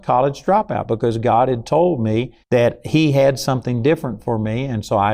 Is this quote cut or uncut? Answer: cut